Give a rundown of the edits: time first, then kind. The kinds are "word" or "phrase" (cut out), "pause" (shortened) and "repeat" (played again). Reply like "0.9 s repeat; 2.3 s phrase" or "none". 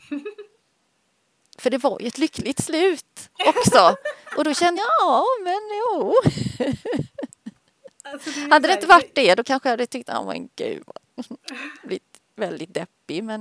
4.8 s phrase